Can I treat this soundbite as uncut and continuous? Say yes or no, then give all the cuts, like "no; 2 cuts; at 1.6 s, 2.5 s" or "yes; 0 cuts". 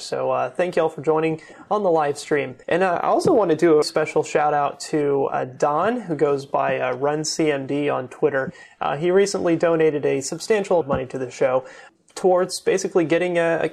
no; 3 cuts; at 2.6 s, 3.8 s, 10.8 s